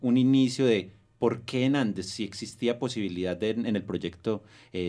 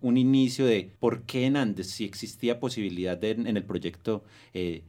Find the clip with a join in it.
second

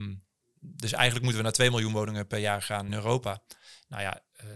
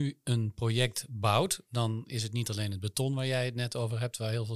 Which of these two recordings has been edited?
first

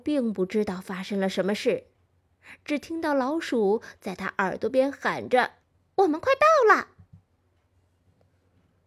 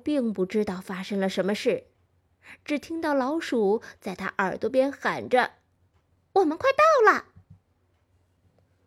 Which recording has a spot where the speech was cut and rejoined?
first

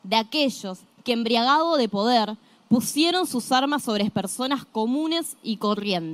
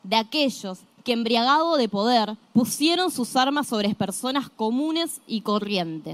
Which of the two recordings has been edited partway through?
second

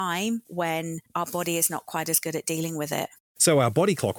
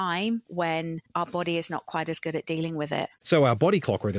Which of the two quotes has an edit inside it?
second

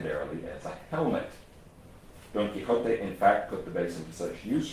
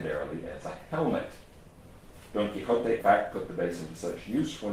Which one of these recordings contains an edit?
second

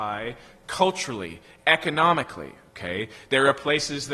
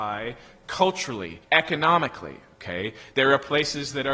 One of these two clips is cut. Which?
second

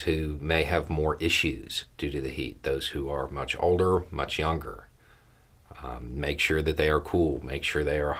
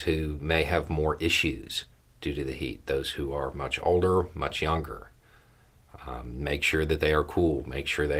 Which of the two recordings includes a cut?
first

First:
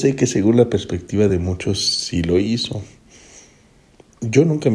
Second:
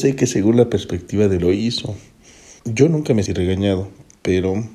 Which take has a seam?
second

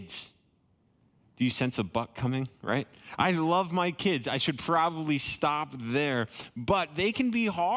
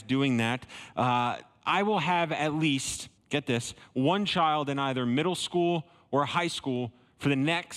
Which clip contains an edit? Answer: second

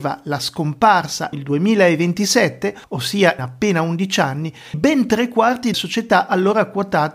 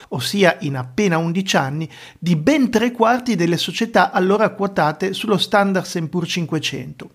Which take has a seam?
first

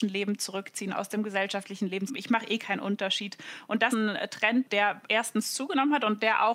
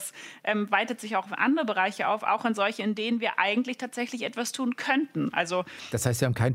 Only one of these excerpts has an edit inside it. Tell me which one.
first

